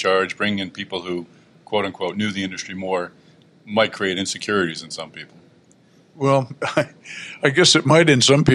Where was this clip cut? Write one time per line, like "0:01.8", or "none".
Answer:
none